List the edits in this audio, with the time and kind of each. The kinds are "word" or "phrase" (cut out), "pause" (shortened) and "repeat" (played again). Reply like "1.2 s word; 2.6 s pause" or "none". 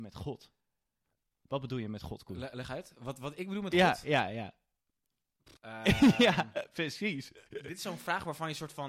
5.6 s pause; 7.5 s pause